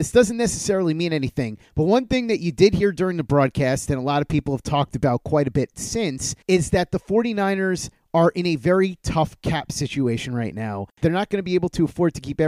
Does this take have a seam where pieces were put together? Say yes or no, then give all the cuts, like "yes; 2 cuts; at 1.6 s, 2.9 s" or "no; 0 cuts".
yes; 2 cuts; at 1.7 s, 6.4 s